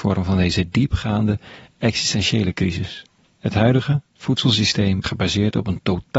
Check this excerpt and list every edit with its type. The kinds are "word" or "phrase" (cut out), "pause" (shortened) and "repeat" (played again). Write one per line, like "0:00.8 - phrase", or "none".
0:03.2 - pause
0:05.0 - word